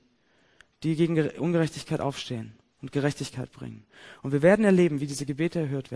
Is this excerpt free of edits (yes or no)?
yes